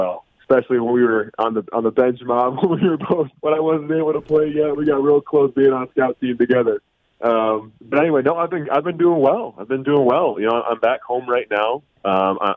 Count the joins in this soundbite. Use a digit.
2